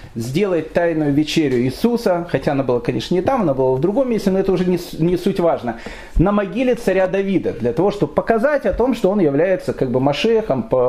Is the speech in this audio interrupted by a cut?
no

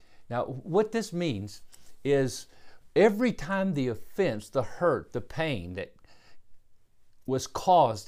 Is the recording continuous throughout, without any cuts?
yes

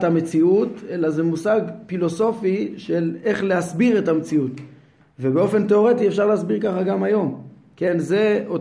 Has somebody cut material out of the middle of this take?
no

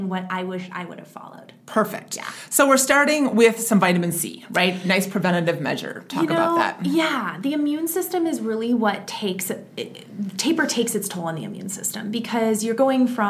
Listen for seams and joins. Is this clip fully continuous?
yes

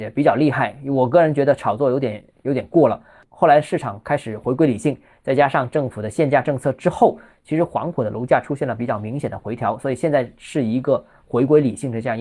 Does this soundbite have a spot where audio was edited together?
no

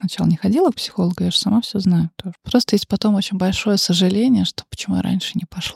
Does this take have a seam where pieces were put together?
no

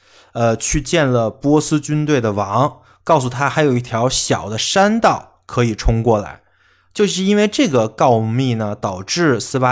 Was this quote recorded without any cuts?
yes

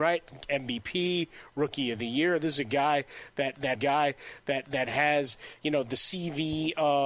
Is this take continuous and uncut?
no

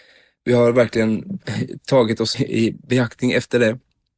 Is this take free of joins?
no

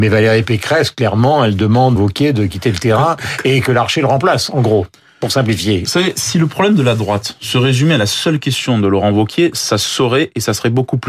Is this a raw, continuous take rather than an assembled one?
no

